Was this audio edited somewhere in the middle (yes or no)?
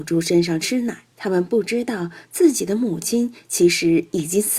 yes